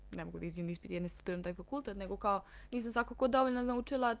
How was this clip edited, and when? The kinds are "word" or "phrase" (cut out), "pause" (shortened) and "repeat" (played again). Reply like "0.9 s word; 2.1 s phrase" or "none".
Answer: none